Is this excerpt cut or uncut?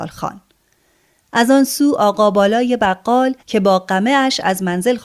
cut